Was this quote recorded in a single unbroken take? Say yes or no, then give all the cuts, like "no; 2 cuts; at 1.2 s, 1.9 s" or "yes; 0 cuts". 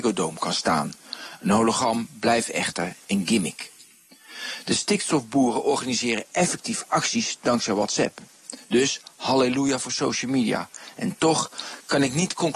yes; 0 cuts